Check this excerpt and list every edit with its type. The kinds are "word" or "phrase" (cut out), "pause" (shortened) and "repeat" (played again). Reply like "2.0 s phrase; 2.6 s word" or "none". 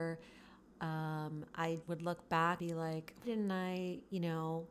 1.8 s word; 2.6 s word; 3.2 s word

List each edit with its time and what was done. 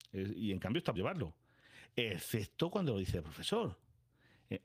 0.9 s word

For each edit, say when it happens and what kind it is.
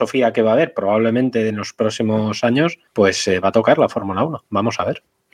2.9 s pause

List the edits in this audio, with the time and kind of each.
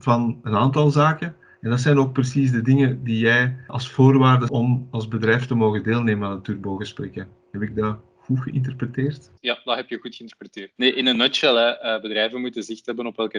4.5 s word; 9.4 s pause

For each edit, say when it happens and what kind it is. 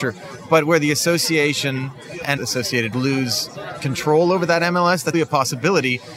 2.4 s word; 2.9 s word; 5.1 s word

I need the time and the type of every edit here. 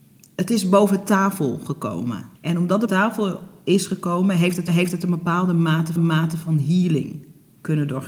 2.3 s pause; 2.9 s word; 4.7 s repeat; 6.0 s repeat

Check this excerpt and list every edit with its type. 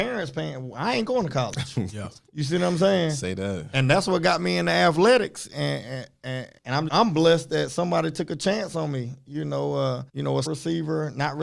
6.6 s pause; 6.9 s word; 10.1 s pause; 10.5 s word

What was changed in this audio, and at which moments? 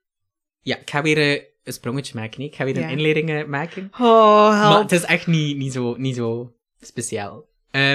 none

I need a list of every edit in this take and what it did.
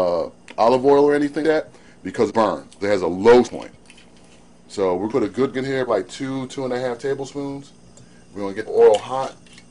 1.4 s word; 2.3 s word; 2.8 s word; 3.4 s word; 5.1 s word; 5.5 s word; 5.9 s word; 8.7 s word

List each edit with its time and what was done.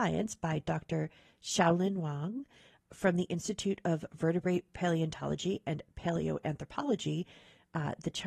none

